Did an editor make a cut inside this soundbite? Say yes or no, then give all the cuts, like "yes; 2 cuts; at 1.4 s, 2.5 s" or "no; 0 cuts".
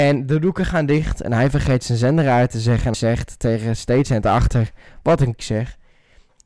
yes; 3 cuts; at 2.9 s, 3.8 s, 5.4 s